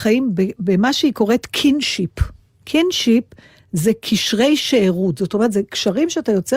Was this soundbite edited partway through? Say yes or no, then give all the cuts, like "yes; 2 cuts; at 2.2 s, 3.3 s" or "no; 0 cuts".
no; 0 cuts